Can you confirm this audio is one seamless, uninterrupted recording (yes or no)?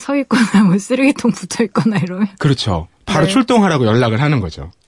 yes